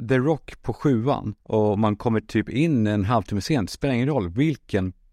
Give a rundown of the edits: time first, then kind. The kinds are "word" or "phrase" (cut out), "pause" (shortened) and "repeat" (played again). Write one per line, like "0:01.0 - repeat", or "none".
0:01.4 - pause